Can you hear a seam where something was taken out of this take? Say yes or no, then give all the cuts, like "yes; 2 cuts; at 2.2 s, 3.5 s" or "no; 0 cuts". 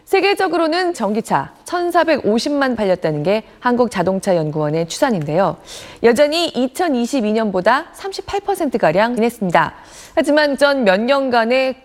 yes; 4 cuts; at 0.9 s, 2.7 s, 9.2 s, 10.6 s